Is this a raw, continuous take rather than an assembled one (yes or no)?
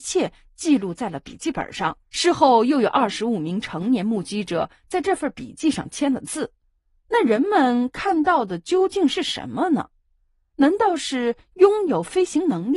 no